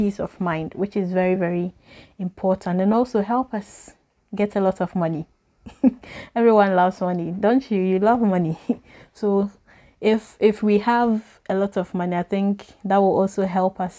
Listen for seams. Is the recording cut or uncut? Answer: uncut